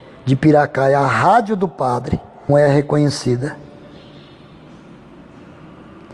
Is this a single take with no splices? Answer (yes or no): no